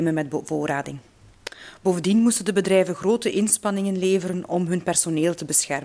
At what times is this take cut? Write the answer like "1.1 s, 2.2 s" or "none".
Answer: none